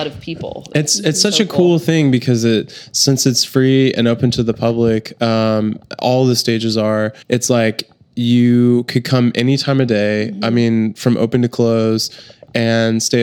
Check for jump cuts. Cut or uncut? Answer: cut